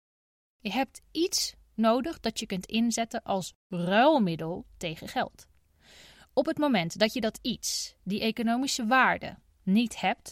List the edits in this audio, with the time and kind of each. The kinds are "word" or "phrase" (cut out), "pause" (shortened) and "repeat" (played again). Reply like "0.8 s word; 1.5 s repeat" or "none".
none